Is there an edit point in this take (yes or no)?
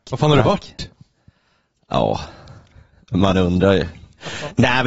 no